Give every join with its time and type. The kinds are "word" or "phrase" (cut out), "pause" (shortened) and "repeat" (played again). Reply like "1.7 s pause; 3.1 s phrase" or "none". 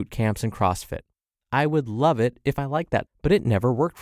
3.1 s word